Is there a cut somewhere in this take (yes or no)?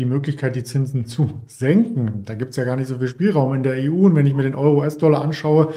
no